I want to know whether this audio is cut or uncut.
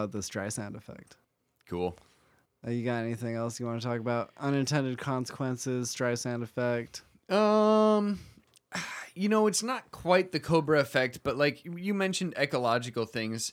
uncut